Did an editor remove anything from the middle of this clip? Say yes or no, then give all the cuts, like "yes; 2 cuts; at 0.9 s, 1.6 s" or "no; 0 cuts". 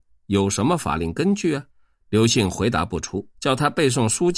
yes; 2 cuts; at 1.7 s, 3.3 s